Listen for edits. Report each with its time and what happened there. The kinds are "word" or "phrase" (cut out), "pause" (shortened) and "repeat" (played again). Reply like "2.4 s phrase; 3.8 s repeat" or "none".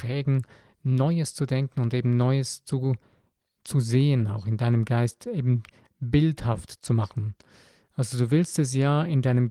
none